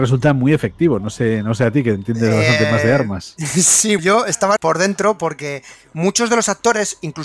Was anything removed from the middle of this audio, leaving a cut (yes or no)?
yes